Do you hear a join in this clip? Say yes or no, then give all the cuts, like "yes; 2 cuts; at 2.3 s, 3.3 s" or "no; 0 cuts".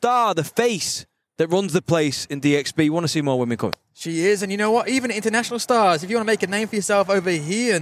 no; 0 cuts